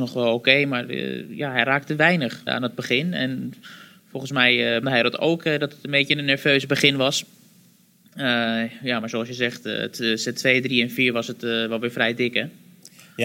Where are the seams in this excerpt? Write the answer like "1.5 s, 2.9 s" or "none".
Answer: 2.5 s, 4.8 s